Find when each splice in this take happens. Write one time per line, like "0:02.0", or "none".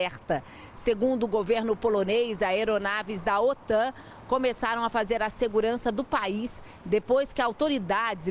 none